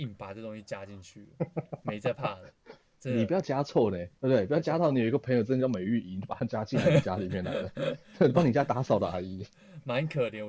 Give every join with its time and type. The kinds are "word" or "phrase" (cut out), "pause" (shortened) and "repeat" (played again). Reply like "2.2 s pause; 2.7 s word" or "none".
4.2 s pause